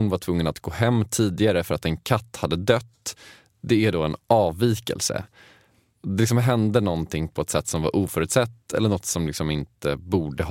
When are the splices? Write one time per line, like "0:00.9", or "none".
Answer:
none